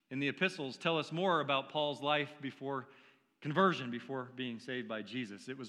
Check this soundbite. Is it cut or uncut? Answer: uncut